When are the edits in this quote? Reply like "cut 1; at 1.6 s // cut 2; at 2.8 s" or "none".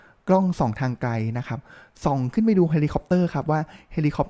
none